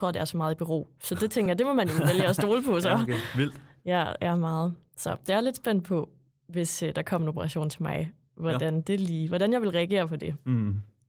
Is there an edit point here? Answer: no; 0 cuts

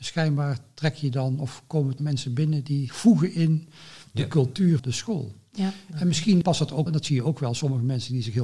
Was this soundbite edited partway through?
yes; 5 cuts; at 2.0 s, 2.9 s, 4.8 s, 6.4 s, 6.9 s

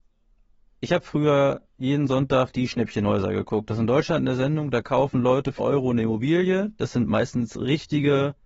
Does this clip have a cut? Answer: yes; 1 cut; at 5.6 s

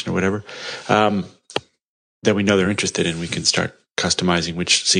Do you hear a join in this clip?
no; 0 cuts

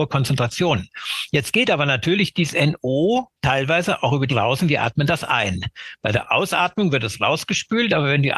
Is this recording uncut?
no; 2 cuts; at 3.4 s, 4.3 s

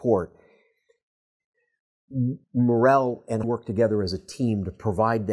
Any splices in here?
yes; 2 cuts; at 2.4 s, 3.4 s

